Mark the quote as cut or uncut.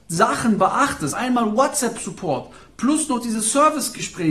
cut